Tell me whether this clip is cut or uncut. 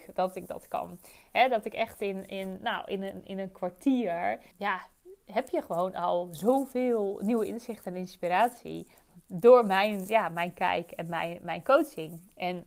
cut